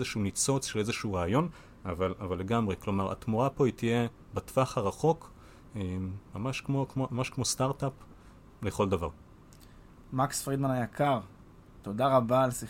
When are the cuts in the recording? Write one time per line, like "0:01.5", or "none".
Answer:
none